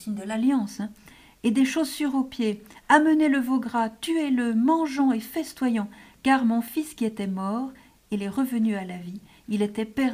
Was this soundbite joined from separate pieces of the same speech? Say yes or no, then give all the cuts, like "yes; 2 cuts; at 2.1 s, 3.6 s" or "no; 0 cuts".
no; 0 cuts